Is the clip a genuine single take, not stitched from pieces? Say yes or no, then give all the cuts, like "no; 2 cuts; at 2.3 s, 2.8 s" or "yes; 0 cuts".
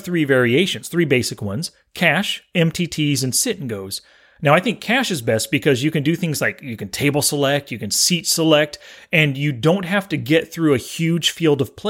yes; 0 cuts